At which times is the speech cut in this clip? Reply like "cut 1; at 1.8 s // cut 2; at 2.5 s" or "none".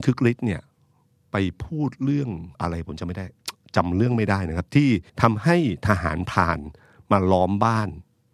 cut 1; at 2.5 s // cut 2; at 5.1 s